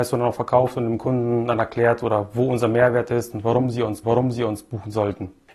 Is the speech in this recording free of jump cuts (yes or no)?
no